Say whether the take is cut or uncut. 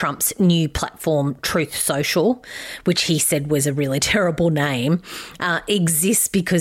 uncut